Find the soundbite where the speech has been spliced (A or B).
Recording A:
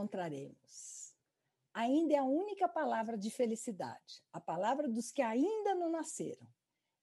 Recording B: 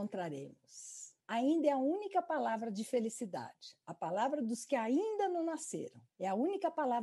B